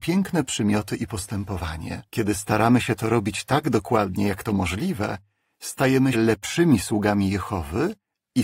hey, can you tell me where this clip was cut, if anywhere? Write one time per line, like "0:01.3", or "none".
0:02.1
0:06.1